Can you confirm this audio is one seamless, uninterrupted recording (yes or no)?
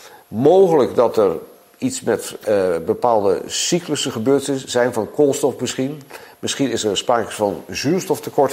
yes